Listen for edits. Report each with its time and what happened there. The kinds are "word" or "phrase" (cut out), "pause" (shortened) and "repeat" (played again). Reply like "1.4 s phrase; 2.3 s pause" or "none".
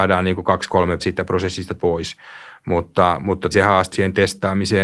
1.0 s word; 1.8 s word; 3.5 s word; 3.9 s phrase

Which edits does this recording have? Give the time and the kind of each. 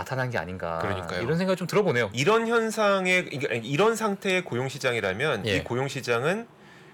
2.1 s phrase

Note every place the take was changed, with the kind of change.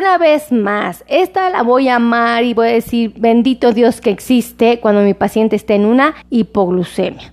6.2 s pause

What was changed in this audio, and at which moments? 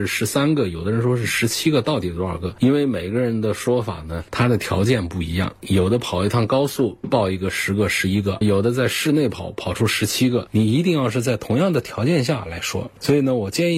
8.4 s word

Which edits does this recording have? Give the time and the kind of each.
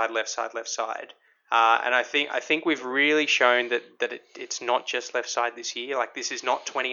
none

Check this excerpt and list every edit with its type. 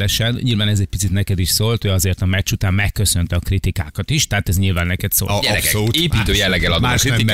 none

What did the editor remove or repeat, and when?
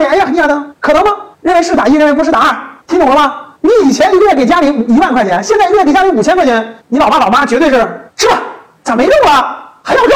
none

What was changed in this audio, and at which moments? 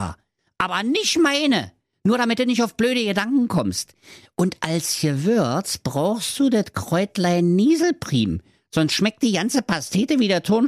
none

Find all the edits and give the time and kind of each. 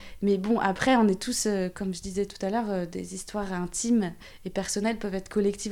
none

